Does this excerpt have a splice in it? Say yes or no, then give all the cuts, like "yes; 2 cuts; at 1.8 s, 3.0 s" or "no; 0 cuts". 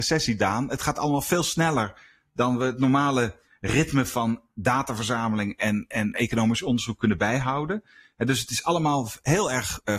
no; 0 cuts